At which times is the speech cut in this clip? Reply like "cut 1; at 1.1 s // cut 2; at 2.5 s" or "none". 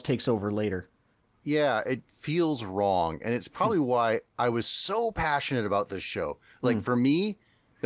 none